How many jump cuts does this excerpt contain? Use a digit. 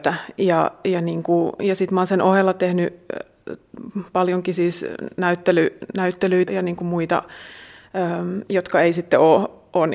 1